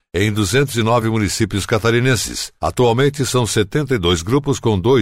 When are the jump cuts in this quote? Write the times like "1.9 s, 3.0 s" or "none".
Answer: none